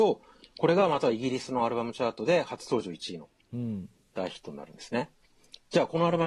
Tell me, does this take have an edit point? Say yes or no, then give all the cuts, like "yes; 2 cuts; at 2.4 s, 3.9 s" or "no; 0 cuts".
no; 0 cuts